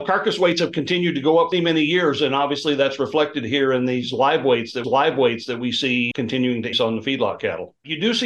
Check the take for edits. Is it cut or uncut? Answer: cut